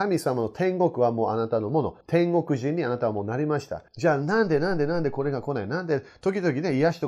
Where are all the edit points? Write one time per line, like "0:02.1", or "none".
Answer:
0:02.0
0:03.9